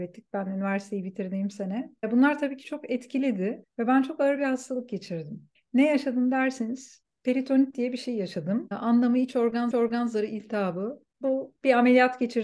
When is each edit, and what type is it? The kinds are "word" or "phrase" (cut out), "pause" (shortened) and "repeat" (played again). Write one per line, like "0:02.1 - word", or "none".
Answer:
0:09.7 - repeat